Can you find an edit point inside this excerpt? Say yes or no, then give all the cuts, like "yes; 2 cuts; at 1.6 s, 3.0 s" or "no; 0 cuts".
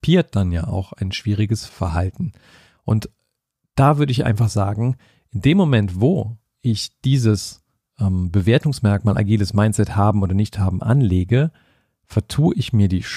no; 0 cuts